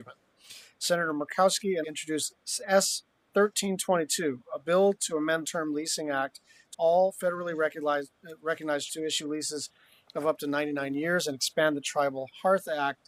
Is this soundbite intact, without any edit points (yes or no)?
no